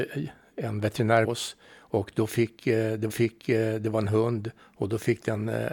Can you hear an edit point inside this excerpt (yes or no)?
yes